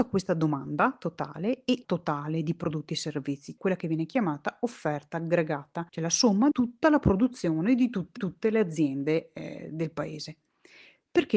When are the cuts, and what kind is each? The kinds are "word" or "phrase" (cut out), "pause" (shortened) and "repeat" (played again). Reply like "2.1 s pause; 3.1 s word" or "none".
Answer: 1.8 s word; 3.6 s word; 5.9 s pause; 6.5 s word; 8.2 s repeat